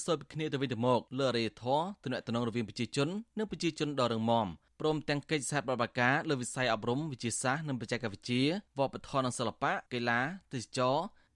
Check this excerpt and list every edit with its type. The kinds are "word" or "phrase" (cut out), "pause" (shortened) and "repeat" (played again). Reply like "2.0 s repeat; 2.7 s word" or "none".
1.1 s pause; 4.7 s pause; 8.7 s pause; 9.9 s pause